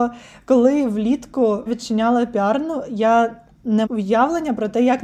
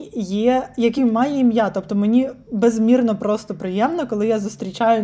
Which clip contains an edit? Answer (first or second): first